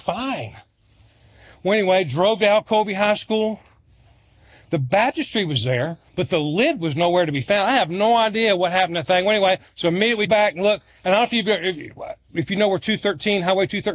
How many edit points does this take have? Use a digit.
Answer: 2